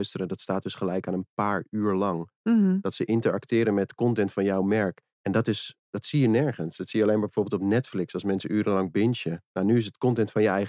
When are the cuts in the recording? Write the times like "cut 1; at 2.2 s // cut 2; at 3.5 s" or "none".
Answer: cut 1; at 5.1 s